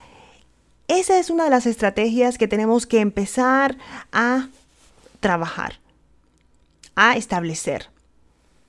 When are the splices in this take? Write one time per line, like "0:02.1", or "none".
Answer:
none